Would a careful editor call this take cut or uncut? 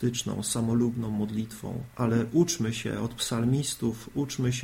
cut